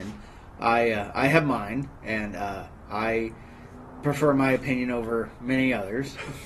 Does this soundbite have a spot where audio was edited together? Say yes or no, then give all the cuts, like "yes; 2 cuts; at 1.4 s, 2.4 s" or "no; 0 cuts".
no; 0 cuts